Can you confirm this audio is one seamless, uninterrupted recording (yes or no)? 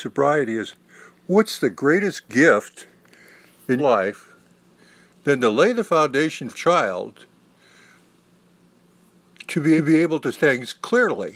no